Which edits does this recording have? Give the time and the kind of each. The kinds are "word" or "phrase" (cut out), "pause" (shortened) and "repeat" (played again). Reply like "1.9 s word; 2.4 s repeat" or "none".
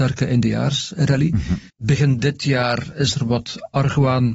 1.7 s pause